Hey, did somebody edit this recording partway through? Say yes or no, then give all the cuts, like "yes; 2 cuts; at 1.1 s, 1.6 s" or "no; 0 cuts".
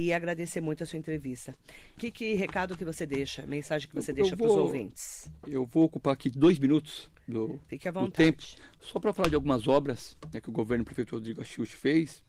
no; 0 cuts